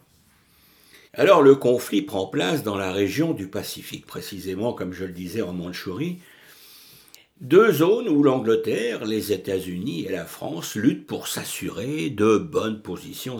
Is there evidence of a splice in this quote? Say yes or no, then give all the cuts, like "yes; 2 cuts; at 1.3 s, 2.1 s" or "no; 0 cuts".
yes; 3 cuts; at 1.1 s, 4.0 s, 7.1 s